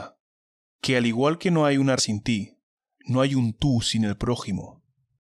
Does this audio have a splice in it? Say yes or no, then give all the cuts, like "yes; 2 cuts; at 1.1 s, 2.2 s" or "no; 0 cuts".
yes; 1 cut; at 2.0 s